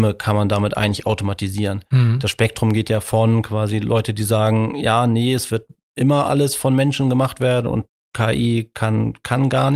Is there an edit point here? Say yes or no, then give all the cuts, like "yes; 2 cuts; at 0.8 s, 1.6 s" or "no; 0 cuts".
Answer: no; 0 cuts